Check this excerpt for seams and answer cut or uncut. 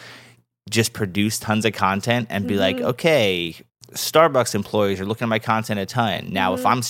cut